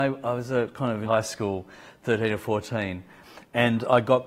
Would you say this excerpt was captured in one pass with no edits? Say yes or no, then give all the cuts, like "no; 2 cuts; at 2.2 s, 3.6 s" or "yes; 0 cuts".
no; 1 cut; at 1.0 s